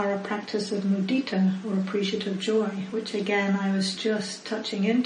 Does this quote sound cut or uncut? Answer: uncut